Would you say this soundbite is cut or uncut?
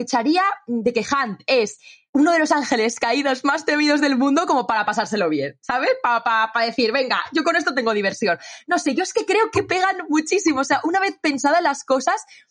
uncut